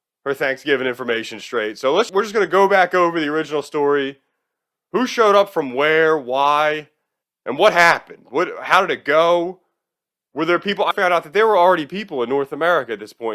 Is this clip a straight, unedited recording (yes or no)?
no